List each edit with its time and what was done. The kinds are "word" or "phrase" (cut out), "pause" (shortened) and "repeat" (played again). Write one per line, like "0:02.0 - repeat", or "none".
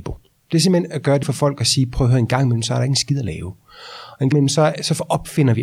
0:01.2 - word
0:04.3 - word